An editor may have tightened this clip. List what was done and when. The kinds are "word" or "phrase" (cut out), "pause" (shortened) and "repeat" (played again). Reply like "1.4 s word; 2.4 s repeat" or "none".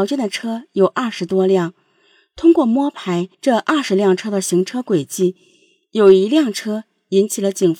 3.3 s pause